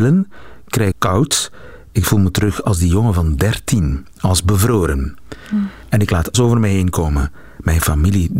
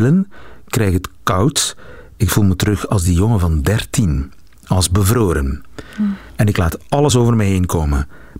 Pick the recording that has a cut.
first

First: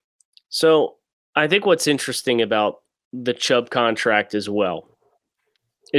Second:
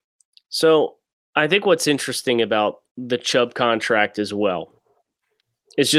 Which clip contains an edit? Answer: second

